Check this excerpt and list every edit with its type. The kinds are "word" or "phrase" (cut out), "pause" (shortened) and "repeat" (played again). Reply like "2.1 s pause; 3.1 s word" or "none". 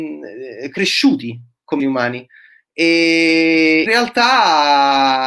1.8 s word; 3.9 s word